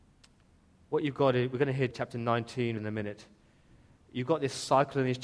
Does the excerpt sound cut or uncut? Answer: cut